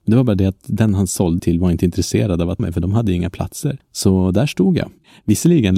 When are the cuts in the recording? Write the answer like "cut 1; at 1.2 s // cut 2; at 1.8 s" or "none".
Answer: cut 1; at 1.4 s // cut 2; at 2.6 s // cut 3; at 3.8 s